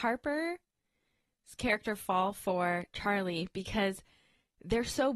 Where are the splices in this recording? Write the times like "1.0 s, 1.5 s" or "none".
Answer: none